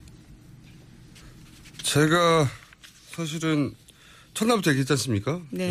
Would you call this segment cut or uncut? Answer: uncut